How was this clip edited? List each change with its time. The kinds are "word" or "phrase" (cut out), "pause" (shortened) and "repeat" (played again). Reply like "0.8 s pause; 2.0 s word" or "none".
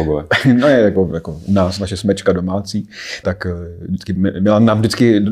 3.2 s word

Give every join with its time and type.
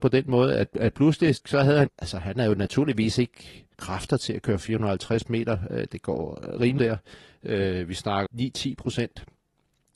1.4 s word; 1.9 s word; 3.7 s pause; 6.8 s phrase; 8.3 s word

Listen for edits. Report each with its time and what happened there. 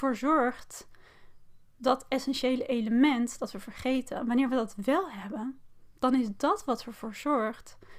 none

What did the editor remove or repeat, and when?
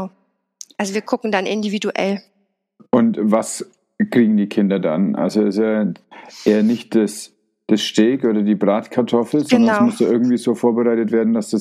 none

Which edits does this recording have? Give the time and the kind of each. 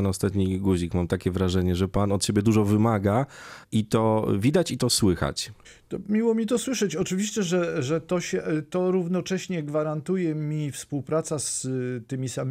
none

